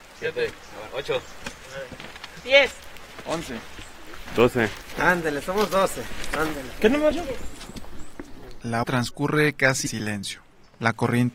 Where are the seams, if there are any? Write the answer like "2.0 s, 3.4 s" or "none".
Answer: 7.1 s, 8.8 s, 9.9 s